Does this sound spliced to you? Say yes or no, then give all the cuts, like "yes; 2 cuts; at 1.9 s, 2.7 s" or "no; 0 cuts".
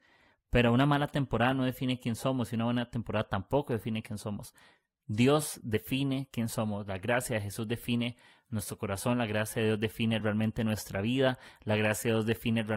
no; 0 cuts